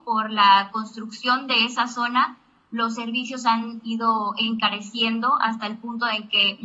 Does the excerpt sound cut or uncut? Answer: uncut